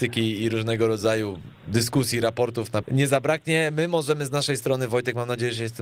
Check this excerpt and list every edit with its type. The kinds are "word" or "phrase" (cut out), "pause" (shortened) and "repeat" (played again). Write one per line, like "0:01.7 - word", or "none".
0:02.8 - word